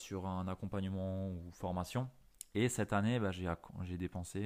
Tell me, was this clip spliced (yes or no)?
no